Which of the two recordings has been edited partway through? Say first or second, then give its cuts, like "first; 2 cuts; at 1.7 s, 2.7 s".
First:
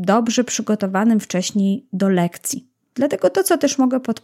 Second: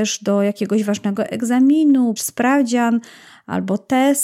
second; 1 cut; at 2.2 s